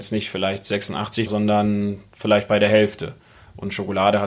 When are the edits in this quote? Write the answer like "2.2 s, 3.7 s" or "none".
1.3 s